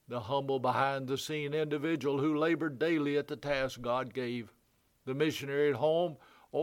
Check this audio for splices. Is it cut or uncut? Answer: uncut